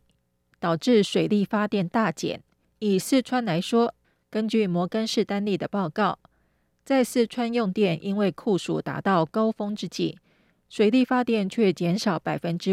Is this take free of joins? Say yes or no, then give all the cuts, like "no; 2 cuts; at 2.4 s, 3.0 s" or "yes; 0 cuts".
no; 1 cut; at 2.6 s